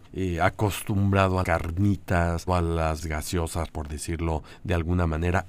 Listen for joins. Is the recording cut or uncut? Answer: cut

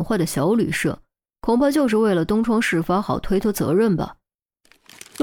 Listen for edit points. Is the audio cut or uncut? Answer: uncut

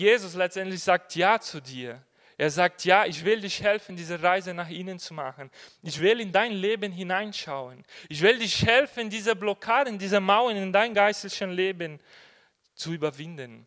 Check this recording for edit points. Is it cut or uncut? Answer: uncut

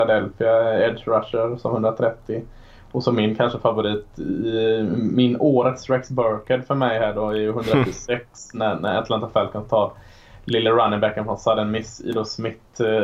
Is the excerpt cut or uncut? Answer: uncut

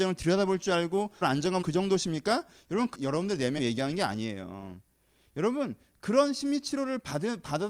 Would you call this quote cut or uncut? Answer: cut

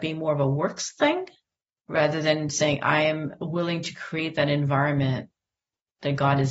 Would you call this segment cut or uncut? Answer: uncut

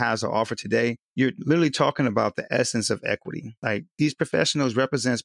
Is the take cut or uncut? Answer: cut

